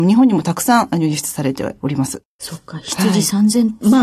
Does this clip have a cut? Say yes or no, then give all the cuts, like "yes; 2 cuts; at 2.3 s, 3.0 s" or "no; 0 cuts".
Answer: yes; 1 cut; at 2.3 s